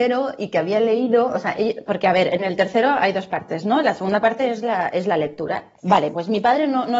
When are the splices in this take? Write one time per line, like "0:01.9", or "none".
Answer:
0:05.8